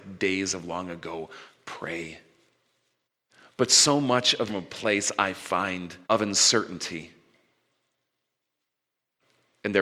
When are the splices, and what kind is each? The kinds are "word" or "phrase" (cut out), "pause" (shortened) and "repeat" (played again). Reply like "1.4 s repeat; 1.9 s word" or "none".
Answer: 3.0 s pause; 4.5 s phrase; 6.0 s pause